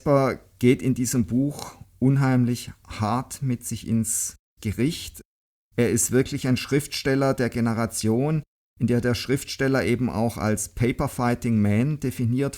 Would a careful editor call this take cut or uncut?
uncut